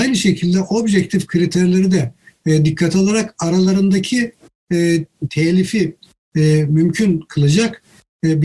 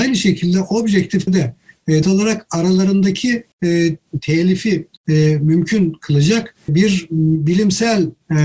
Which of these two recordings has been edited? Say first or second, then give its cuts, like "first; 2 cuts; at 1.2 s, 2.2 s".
second; 5 cuts; at 1.3 s, 2.0 s, 3.5 s, 5.0 s, 6.7 s